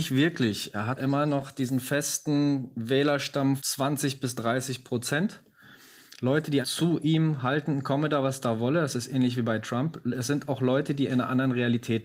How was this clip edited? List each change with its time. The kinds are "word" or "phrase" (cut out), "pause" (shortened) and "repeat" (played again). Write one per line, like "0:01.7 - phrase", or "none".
0:01.0 - word
0:03.6 - word
0:06.6 - word